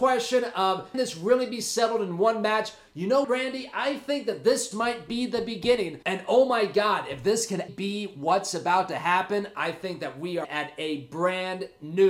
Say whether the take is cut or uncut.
cut